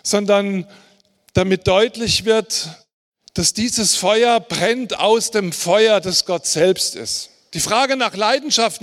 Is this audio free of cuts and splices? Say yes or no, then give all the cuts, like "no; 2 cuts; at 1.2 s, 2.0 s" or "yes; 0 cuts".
yes; 0 cuts